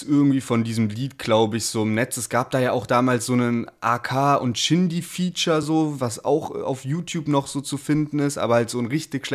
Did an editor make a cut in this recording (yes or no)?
no